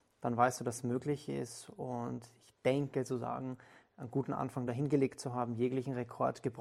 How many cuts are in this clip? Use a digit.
0